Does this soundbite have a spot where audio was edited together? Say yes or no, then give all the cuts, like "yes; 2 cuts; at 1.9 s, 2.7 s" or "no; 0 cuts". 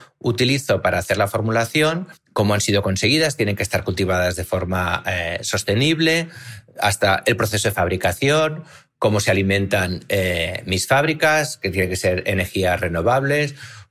yes; 1 cut; at 2.2 s